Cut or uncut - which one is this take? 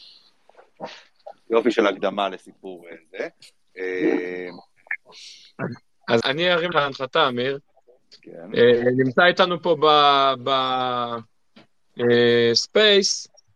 cut